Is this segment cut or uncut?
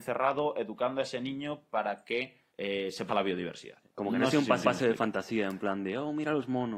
cut